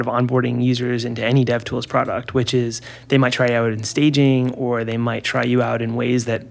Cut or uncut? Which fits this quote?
uncut